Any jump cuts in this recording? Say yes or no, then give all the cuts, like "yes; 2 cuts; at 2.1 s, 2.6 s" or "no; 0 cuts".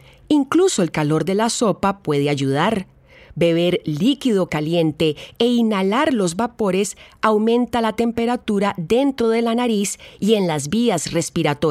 no; 0 cuts